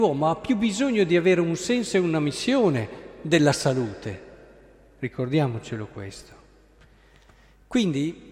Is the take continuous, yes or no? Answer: yes